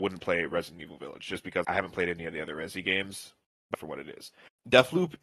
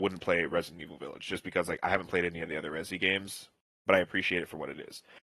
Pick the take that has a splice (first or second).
first